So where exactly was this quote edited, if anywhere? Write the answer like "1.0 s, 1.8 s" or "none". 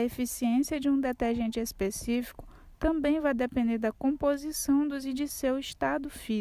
5.0 s

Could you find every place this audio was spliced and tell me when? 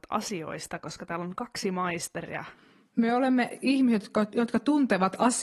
none

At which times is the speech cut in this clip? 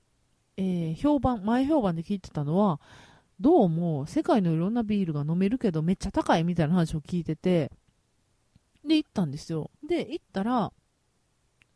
9.8 s

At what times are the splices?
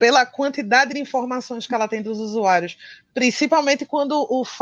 none

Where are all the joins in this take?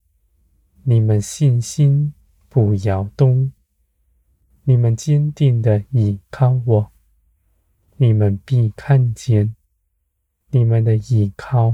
none

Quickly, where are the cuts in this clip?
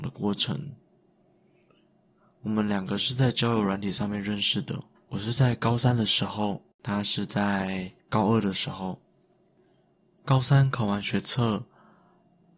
5.0 s, 6.7 s, 8.0 s

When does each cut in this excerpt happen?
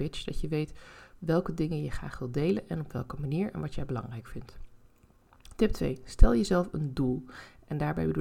none

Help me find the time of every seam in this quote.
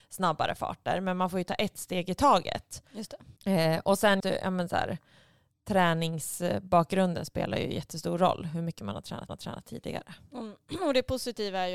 3.4 s, 4.2 s, 9.3 s

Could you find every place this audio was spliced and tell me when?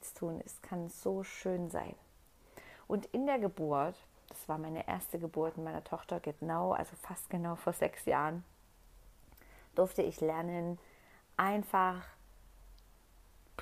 none

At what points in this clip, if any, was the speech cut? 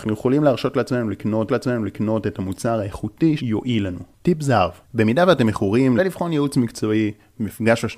1.5 s, 3.4 s, 4.8 s, 6.0 s

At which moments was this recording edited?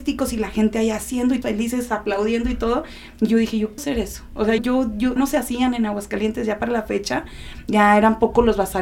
1.4 s, 3.8 s, 4.6 s, 5.2 s

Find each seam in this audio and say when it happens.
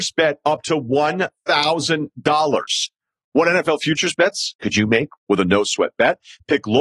none

